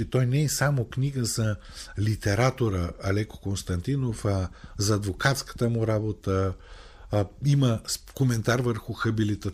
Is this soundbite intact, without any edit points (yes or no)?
yes